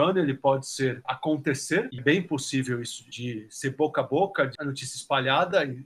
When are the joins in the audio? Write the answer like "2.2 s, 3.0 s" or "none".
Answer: 1.0 s, 2.0 s, 4.6 s